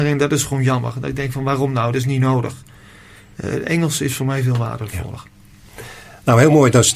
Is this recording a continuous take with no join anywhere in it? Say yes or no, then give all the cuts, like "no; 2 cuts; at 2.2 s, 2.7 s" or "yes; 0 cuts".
yes; 0 cuts